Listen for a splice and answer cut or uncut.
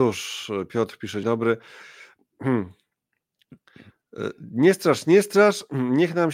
cut